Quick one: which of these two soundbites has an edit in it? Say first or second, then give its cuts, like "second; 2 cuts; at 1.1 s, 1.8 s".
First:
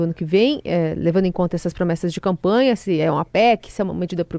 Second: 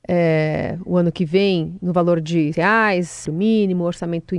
second; 2 cuts; at 2.5 s, 3.3 s